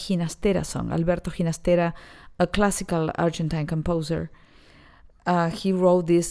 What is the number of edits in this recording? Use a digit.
0